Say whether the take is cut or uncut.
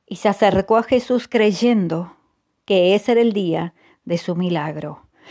uncut